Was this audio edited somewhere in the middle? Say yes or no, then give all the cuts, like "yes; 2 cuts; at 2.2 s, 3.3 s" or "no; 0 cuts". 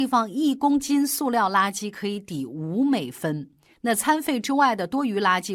no; 0 cuts